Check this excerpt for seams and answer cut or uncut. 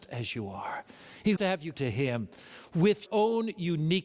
cut